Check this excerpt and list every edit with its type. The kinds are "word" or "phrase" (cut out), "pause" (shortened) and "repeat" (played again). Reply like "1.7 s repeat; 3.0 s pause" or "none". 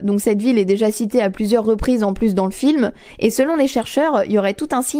none